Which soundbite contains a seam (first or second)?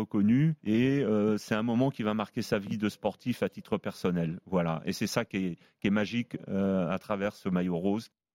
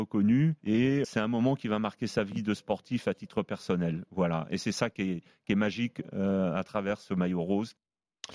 second